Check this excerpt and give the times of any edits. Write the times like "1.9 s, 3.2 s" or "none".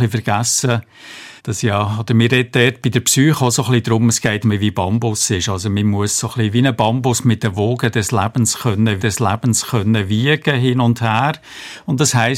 1.4 s, 4.4 s, 9.0 s

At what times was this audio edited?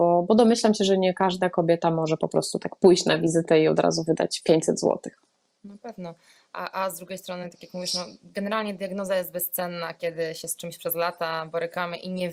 none

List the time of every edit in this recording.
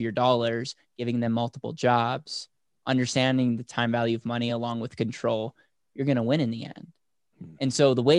none

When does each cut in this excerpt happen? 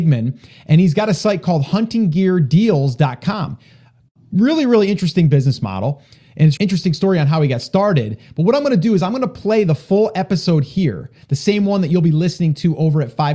6.6 s

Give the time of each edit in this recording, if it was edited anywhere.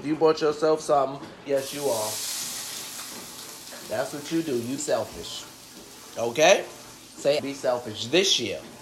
1.5 s, 4.8 s, 7.4 s

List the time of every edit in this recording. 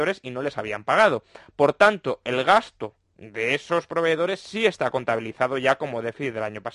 3.0 s

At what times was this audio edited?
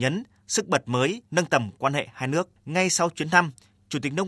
1.3 s, 2.6 s

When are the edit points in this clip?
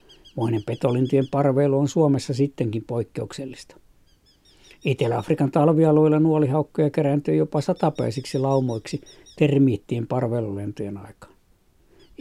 none

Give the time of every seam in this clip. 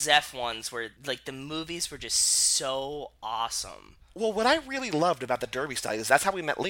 1.0 s

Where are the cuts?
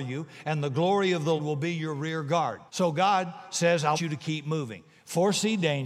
1.4 s, 2.7 s, 3.9 s

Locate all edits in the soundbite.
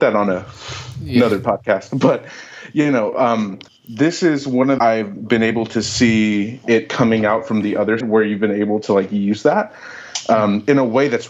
3.7 s, 4.8 s, 8.0 s

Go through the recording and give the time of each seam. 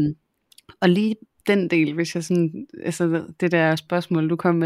none

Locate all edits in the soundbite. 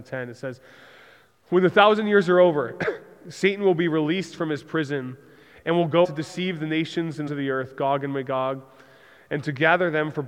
6.0 s, 7.3 s

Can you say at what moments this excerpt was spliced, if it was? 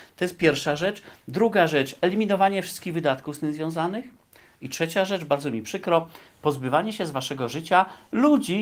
none

